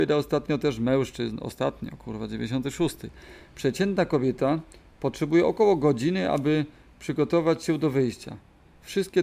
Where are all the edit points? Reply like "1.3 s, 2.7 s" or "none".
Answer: none